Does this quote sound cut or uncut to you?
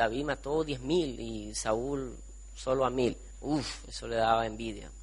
cut